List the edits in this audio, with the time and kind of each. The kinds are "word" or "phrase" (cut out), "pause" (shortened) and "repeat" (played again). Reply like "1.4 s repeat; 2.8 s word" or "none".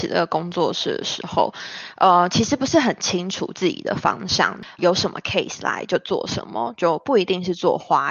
4.8 s word